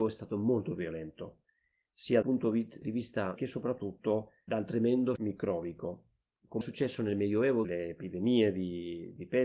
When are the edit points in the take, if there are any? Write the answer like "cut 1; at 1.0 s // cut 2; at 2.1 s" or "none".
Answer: cut 1; at 2.2 s // cut 2; at 2.8 s // cut 3; at 3.4 s // cut 4; at 4.5 s // cut 5; at 5.2 s // cut 6; at 6.6 s // cut 7; at 7.6 s

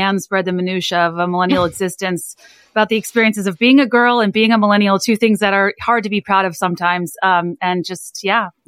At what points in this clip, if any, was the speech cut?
none

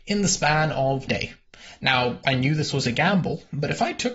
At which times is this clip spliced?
cut 1; at 1.1 s // cut 2; at 2.2 s

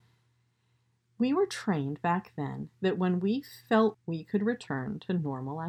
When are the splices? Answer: cut 1; at 3.9 s

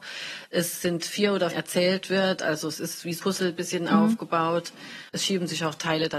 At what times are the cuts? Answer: cut 1; at 1.5 s // cut 2; at 3.2 s // cut 3; at 5.1 s

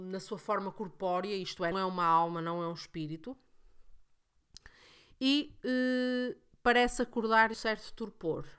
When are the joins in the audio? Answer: cut 1; at 1.7 s // cut 2; at 7.5 s

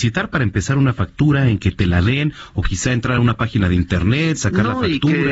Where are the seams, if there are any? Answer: none

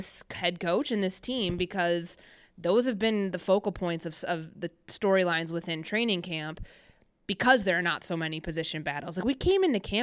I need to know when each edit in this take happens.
none

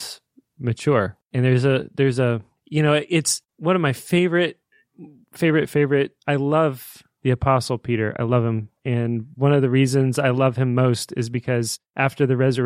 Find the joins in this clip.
cut 1; at 5.4 s

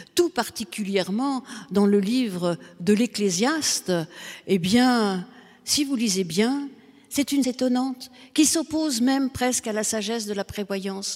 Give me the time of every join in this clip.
cut 1; at 7.4 s

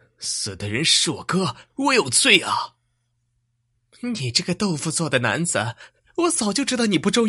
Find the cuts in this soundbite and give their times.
cut 1; at 1.7 s

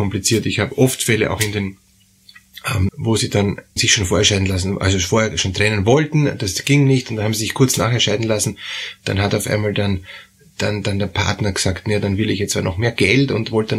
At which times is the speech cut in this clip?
cut 1; at 2.9 s // cut 2; at 3.8 s

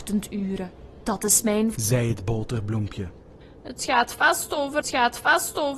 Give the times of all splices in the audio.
cut 1; at 1.7 s // cut 2; at 4.8 s

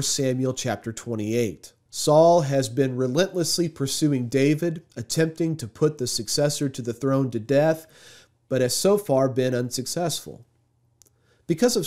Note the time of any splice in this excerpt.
none

